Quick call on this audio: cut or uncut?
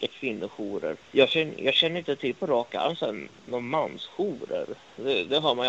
cut